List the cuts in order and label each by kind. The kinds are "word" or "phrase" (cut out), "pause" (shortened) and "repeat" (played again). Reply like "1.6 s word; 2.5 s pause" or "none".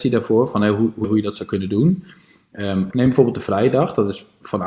1.0 s word; 2.9 s word